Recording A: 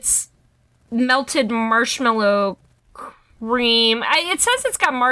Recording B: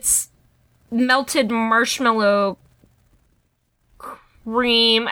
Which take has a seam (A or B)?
A